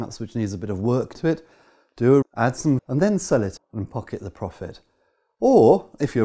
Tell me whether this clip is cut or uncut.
cut